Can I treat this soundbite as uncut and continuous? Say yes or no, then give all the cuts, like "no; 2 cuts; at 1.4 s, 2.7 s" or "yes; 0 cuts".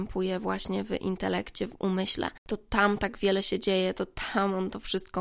yes; 0 cuts